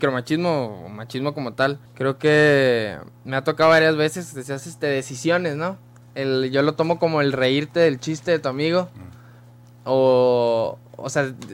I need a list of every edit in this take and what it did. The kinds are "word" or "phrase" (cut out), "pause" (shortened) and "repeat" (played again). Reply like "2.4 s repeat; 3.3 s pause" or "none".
1.9 s pause